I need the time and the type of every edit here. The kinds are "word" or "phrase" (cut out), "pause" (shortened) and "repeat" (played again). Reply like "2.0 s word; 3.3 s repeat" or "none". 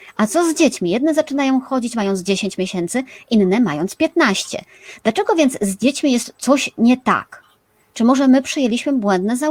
none